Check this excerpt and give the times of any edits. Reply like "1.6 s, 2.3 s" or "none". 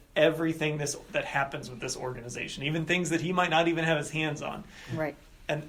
none